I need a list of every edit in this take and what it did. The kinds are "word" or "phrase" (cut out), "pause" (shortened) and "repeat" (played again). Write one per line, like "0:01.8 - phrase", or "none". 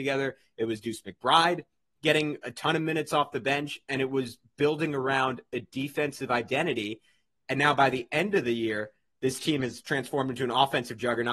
none